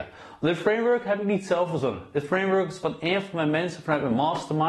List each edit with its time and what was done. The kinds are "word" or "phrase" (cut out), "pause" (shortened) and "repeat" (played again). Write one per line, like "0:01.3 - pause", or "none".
none